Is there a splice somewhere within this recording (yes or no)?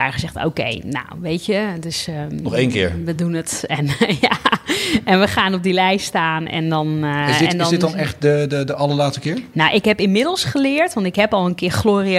no